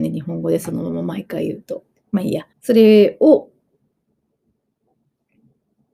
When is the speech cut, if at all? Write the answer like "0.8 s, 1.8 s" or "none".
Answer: 1.9 s, 2.5 s